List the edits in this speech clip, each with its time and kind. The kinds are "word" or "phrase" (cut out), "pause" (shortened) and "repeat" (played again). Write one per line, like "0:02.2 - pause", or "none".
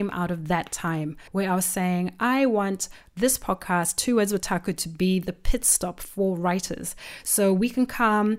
0:01.3 - pause